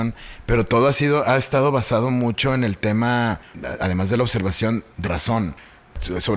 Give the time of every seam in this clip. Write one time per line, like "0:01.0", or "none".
0:05.0